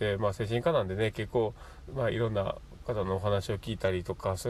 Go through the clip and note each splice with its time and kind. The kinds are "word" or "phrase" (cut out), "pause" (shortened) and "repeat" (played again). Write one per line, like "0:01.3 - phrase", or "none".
0:01.9 - phrase